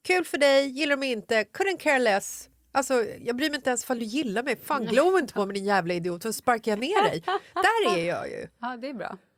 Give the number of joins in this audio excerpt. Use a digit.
0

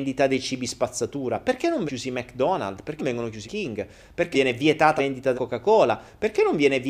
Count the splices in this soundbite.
6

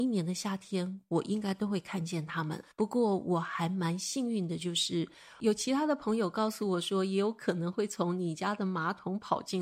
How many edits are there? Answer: 1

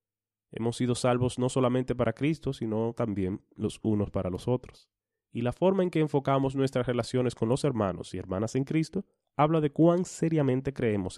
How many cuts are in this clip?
1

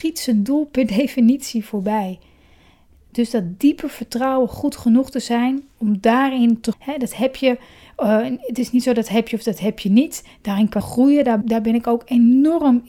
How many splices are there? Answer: 3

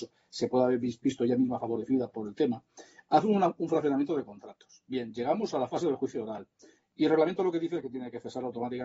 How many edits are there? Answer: 0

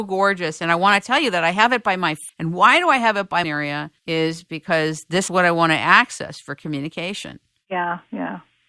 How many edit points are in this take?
4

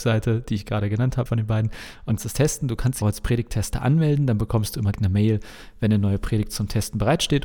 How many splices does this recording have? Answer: 4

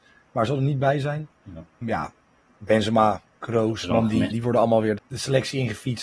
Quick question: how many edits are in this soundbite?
3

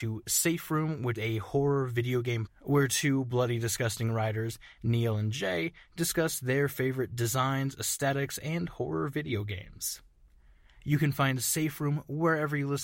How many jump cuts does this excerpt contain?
2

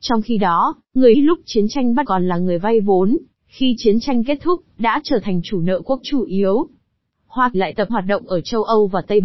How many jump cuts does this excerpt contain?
5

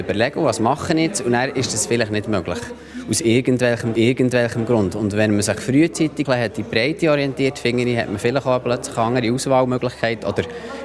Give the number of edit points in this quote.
2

